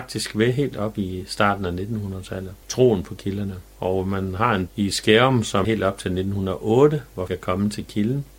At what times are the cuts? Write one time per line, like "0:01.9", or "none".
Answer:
0:02.6
0:04.7
0:05.6
0:07.3

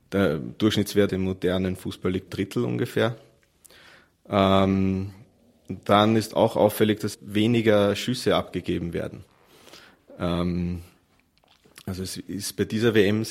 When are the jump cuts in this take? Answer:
0:01.1
0:02.3
0:07.1

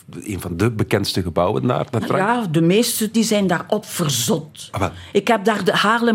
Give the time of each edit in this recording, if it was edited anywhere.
0:02.0
0:03.1

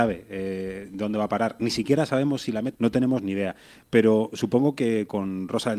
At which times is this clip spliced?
0:02.7

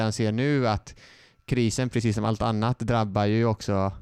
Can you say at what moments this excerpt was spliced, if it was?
none

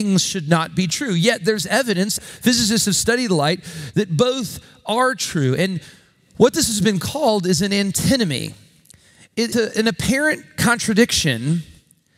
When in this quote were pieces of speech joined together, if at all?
0:02.2
0:09.5

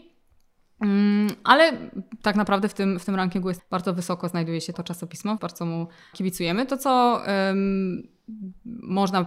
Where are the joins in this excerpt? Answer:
0:03.6
0:04.7
0:05.4
0:06.1

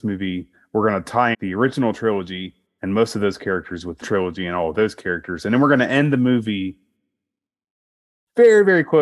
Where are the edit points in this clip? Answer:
0:01.3
0:04.0

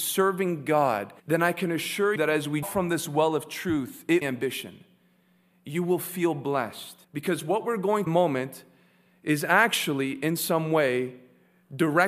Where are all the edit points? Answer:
0:01.2
0:02.2
0:02.6
0:04.2
0:07.0
0:08.1

